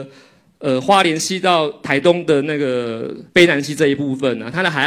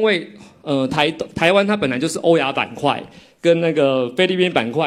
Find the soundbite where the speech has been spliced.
first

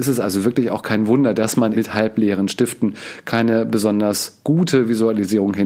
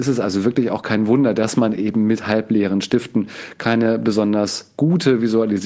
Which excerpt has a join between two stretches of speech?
first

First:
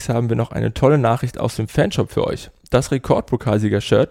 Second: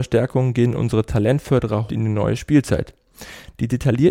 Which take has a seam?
second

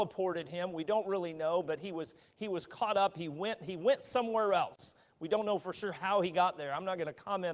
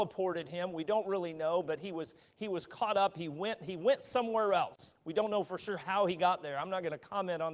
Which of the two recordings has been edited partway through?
second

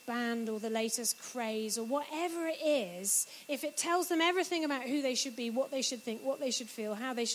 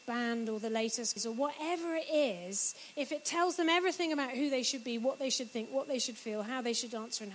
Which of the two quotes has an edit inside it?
second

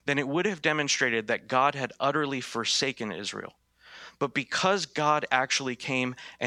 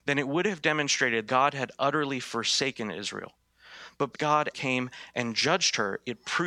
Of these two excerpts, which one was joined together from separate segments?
second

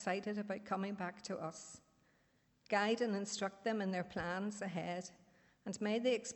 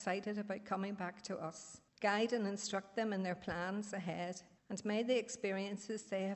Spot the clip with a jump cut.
second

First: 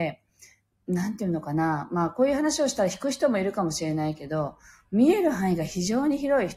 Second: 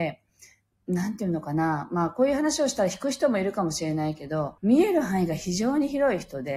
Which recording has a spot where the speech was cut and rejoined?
second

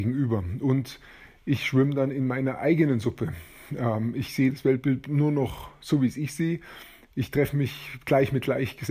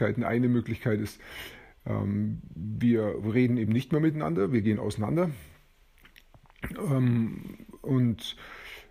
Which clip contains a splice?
first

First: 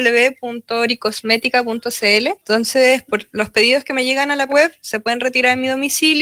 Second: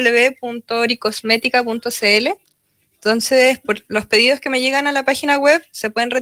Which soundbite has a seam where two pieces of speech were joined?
first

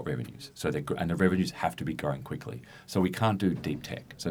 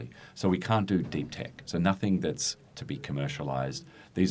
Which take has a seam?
second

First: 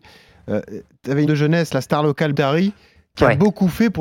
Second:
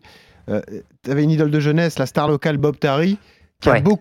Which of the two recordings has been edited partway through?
first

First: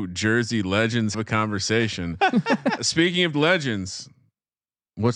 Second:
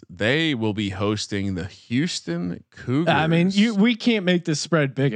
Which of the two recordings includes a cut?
first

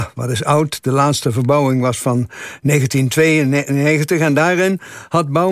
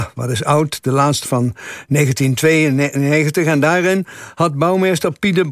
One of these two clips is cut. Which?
second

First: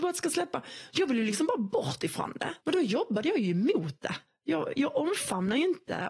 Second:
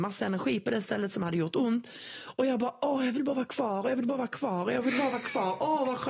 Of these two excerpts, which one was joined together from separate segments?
first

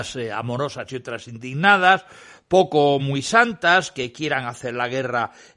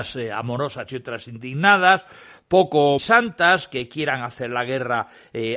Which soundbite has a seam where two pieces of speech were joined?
second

